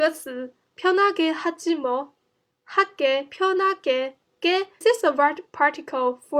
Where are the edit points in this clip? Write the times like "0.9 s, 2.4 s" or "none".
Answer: 4.8 s

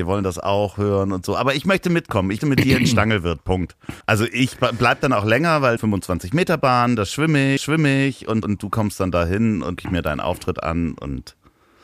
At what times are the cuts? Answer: 2.4 s, 4.0 s, 5.8 s, 7.6 s, 8.4 s, 9.8 s

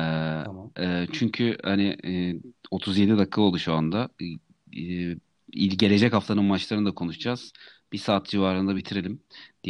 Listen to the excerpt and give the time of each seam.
none

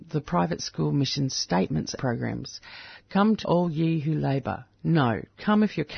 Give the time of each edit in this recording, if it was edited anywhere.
2.0 s, 3.4 s

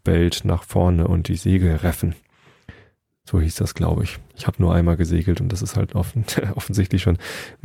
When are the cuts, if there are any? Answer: none

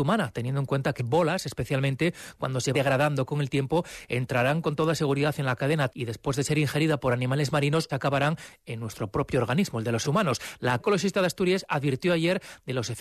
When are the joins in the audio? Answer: 1.0 s, 2.7 s, 5.9 s, 7.9 s, 10.0 s, 10.8 s

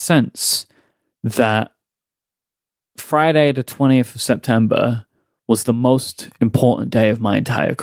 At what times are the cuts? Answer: none

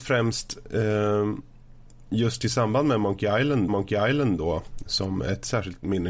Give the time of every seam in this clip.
3.7 s

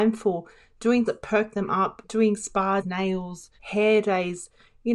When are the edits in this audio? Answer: 1.1 s, 2.0 s, 2.8 s, 3.6 s

